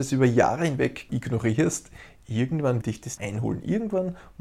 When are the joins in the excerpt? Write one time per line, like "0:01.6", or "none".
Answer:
0:01.1
0:02.8
0:03.2